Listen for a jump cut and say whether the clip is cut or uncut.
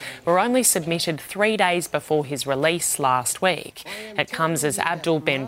uncut